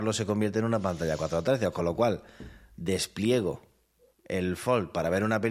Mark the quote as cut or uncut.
uncut